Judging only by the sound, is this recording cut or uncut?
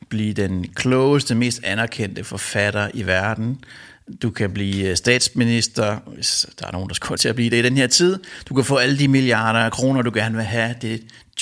cut